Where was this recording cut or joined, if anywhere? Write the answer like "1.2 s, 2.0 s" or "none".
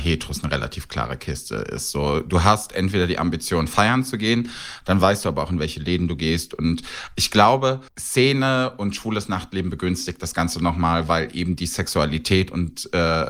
7.9 s